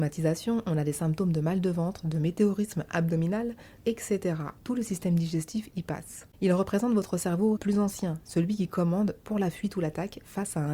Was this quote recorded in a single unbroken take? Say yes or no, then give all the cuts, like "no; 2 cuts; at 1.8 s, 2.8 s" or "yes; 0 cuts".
no; 4 cuts; at 3.8 s, 4.6 s, 6.3 s, 7.6 s